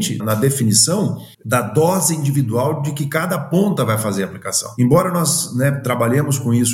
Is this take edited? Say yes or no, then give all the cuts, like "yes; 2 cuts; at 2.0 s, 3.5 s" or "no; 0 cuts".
yes; 1 cut; at 1.3 s